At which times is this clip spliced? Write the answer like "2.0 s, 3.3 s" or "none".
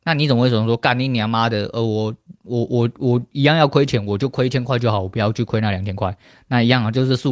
none